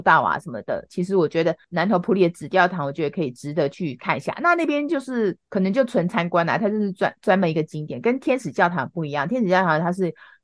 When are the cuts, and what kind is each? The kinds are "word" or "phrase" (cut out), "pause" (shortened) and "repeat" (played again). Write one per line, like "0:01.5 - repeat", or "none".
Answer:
0:05.4 - pause